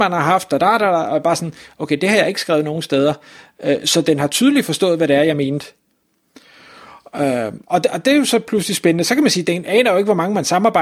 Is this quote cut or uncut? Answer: uncut